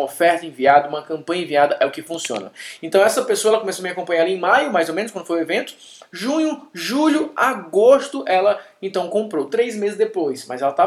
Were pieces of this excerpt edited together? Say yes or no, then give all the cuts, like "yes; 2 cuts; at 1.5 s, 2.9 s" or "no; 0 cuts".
no; 0 cuts